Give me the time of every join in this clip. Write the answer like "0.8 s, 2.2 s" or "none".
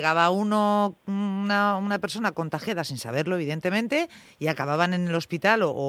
none